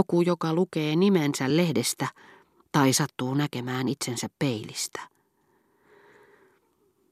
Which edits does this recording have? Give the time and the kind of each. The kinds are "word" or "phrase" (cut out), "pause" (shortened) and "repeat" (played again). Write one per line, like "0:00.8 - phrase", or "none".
none